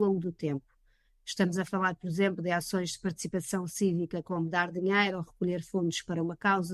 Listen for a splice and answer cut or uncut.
uncut